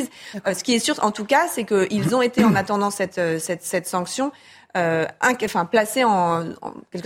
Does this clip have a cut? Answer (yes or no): no